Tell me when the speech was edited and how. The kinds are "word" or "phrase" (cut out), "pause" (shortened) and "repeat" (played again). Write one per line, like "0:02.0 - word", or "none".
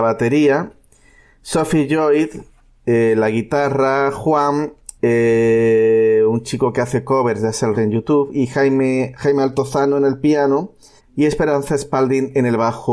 0:05.0 - pause
0:07.7 - word
0:11.0 - pause